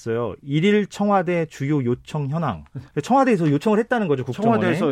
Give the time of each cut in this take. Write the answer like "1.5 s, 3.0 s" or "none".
2.9 s